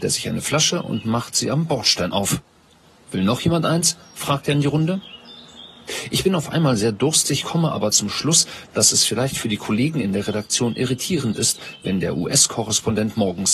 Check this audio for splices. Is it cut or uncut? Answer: uncut